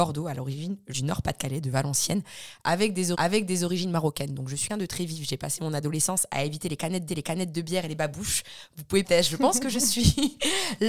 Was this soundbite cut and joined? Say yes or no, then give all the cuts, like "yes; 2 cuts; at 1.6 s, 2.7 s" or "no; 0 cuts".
yes; 5 cuts; at 0.9 s, 3.1 s, 4.7 s, 7.1 s, 9.0 s